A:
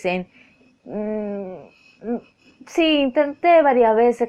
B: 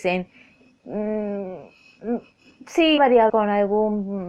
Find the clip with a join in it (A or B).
B